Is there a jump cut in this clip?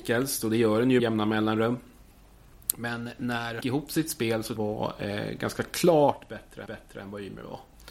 yes; 4 cuts; at 1.0 s, 3.6 s, 4.6 s, 6.7 s

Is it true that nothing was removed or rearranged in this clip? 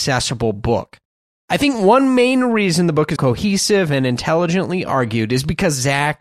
no; 2 cuts; at 1.2 s, 3.2 s

